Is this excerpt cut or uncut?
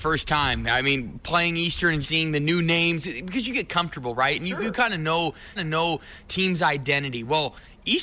cut